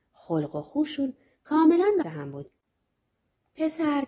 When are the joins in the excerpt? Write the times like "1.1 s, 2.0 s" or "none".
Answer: 2.0 s